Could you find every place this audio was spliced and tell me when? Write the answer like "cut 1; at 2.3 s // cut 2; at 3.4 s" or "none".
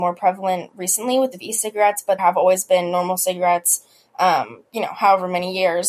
cut 1; at 1.3 s // cut 2; at 2.2 s // cut 3; at 4.7 s